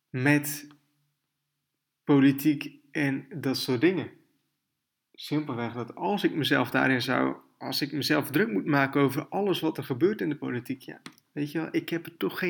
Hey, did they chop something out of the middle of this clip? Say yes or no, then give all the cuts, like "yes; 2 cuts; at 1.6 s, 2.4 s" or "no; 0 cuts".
no; 0 cuts